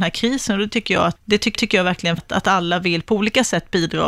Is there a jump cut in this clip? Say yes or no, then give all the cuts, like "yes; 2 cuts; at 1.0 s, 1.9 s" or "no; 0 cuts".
yes; 3 cuts; at 1.2 s, 1.5 s, 2.2 s